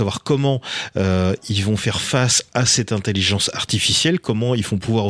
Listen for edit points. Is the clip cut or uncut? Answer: uncut